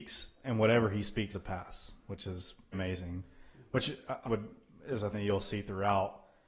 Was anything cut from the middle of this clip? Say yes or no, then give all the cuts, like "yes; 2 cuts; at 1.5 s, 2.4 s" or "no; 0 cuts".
yes; 4 cuts; at 1.3 s, 2.7 s, 4.2 s, 5.1 s